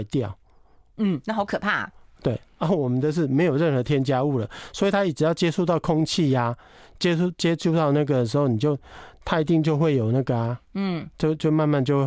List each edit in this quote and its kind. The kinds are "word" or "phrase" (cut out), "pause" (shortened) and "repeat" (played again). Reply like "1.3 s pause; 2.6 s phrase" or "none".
none